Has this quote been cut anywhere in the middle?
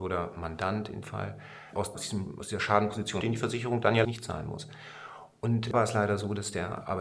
yes; 5 cuts; at 1.0 s, 1.9 s, 3.2 s, 4.0 s, 5.7 s

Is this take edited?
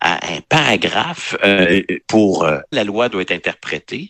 yes; 1 cut; at 2.7 s

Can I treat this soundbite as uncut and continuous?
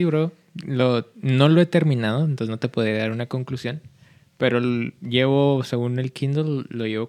yes; 0 cuts

